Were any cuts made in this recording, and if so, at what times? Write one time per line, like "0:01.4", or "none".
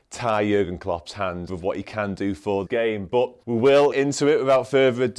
0:01.5
0:02.7
0:03.4
0:03.9